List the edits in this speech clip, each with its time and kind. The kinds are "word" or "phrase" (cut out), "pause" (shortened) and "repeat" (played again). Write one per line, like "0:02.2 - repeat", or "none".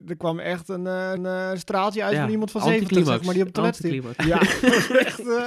0:01.2 - repeat
0:04.2 - word